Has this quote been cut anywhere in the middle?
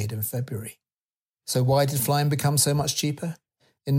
no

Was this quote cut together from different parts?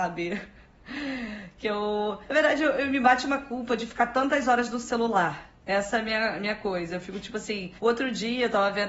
yes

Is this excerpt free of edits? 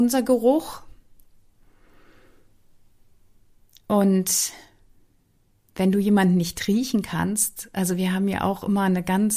yes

